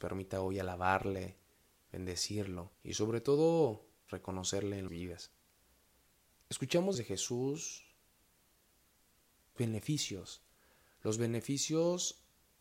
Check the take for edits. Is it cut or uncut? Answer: cut